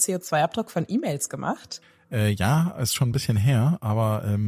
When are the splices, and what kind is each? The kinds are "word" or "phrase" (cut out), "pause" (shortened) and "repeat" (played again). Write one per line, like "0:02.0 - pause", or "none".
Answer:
none